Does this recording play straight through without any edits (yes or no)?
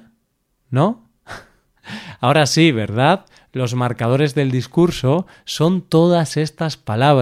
yes